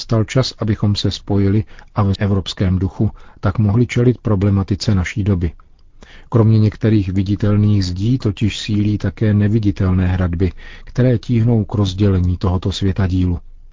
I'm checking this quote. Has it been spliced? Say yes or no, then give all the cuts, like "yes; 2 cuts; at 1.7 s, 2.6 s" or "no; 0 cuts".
yes; 1 cut; at 2.2 s